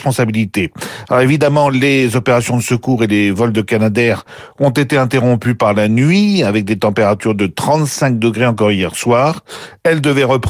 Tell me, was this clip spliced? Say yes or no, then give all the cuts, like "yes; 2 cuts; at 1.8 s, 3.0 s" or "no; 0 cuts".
no; 0 cuts